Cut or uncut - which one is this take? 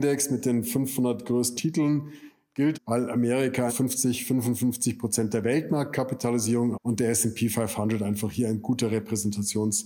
cut